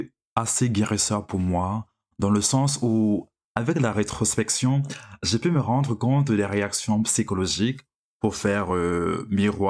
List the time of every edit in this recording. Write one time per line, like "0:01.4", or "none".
none